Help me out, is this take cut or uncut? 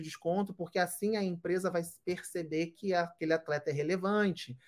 uncut